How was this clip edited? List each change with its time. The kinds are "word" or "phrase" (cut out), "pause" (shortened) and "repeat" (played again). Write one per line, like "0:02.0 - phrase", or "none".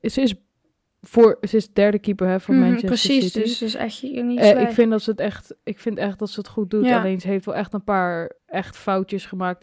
0:08.4 - pause